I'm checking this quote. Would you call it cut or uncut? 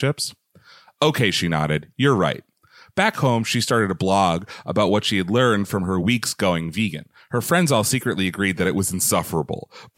uncut